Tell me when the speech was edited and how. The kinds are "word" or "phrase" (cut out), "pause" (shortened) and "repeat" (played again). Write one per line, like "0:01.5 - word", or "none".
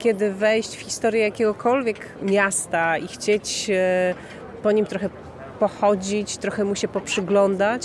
none